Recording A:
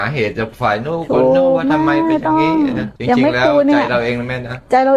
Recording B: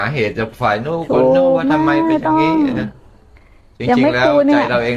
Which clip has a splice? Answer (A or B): A